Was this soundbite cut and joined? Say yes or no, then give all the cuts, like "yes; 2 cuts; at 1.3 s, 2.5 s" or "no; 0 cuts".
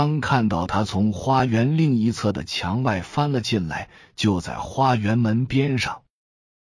no; 0 cuts